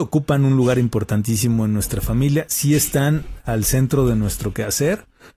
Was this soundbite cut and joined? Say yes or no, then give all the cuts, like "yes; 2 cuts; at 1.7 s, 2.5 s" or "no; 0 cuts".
no; 0 cuts